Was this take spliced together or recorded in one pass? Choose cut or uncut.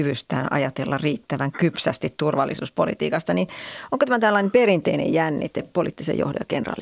uncut